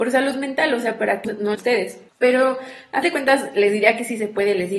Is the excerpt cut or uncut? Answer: cut